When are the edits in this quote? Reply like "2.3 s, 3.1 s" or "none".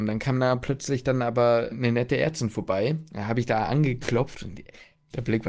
1.7 s